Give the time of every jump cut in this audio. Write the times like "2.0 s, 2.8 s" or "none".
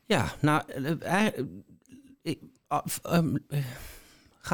none

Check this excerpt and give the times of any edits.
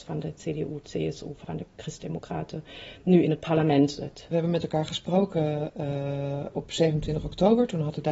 1.4 s

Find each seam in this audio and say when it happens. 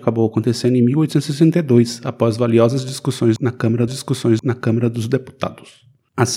3.9 s

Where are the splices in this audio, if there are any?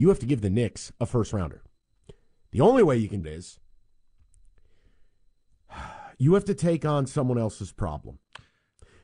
3.2 s

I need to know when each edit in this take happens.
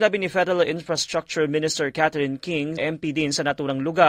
2.8 s

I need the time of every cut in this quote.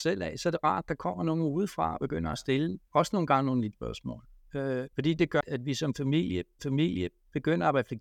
3.7 s, 4.9 s, 5.4 s, 6.6 s

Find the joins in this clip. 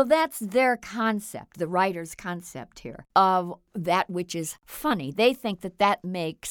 none

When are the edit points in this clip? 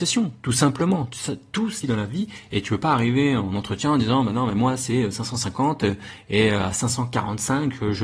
1.8 s

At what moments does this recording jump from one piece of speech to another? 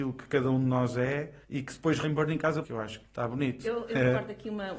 1.4 s, 2.0 s, 2.6 s, 3.0 s

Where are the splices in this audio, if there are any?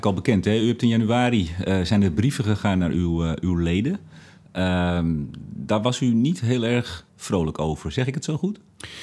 7.1 s

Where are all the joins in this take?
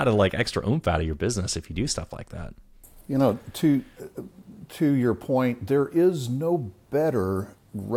none

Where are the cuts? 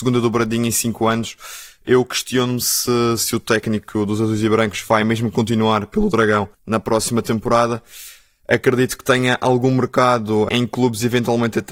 6.5 s

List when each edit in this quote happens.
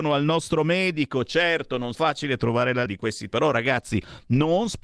1.9 s, 2.9 s, 3.3 s

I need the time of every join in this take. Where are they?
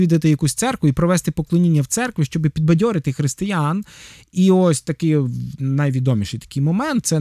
none

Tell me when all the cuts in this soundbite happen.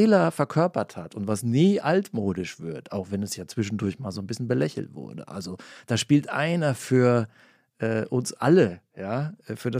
none

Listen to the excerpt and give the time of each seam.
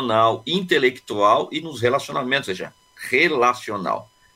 1.6 s, 2.4 s

